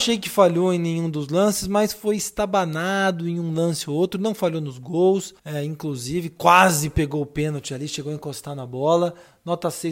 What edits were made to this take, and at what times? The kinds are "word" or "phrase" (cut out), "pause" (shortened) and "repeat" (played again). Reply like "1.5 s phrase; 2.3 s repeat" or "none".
5.4 s pause